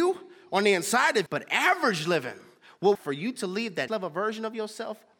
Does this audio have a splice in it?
yes; 3 cuts; at 1.3 s, 2.9 s, 3.9 s

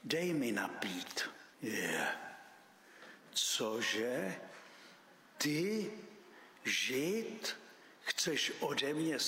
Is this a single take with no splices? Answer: no; 1 cut; at 1.5 s

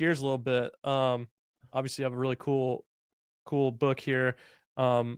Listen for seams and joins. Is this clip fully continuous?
yes; 0 cuts

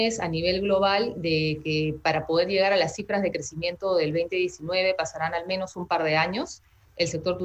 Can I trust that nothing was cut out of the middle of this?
yes; 0 cuts

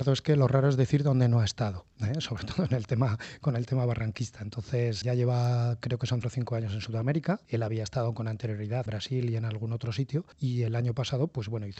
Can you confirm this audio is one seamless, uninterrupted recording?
no; 6 cuts; at 1.9 s, 5.0 s, 6.2 s, 7.4 s, 8.9 s, 10.3 s

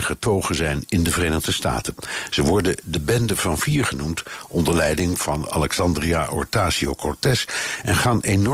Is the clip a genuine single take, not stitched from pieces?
yes; 0 cuts

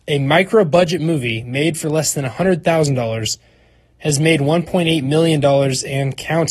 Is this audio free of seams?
yes; 0 cuts

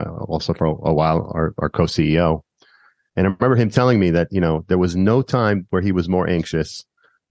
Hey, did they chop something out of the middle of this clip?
no; 0 cuts

